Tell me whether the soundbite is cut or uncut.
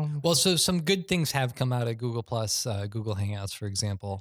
uncut